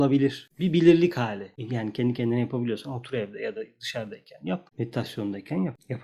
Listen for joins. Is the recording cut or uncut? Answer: uncut